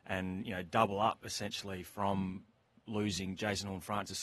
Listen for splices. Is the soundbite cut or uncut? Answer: uncut